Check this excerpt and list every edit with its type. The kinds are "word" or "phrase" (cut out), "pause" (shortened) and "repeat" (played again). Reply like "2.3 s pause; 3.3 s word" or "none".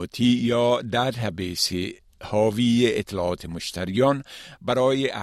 none